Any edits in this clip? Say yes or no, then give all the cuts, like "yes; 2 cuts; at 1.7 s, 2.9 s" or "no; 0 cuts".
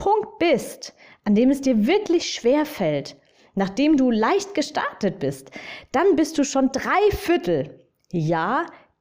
no; 0 cuts